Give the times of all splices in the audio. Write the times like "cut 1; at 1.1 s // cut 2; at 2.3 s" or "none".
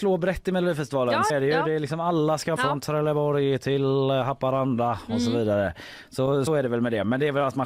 cut 1; at 1.3 s // cut 2; at 2.6 s // cut 3; at 6.5 s